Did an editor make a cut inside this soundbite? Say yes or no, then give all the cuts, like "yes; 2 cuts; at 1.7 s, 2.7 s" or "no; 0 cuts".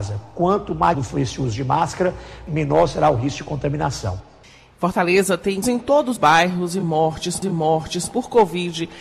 yes; 5 cuts; at 0.9 s, 4.4 s, 5.6 s, 6.2 s, 7.4 s